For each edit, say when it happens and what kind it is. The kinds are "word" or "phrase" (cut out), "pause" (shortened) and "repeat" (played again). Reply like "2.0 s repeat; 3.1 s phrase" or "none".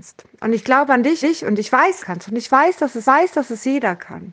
1.2 s repeat; 2.0 s phrase; 3.0 s repeat